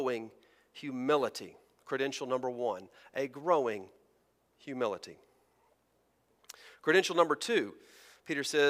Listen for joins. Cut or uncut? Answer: uncut